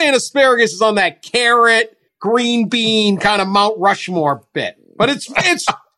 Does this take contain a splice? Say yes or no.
yes